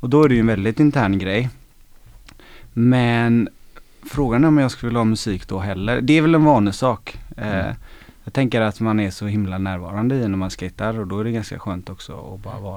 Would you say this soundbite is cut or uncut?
uncut